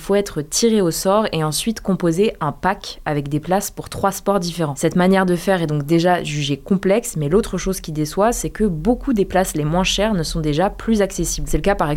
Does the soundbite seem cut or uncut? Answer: uncut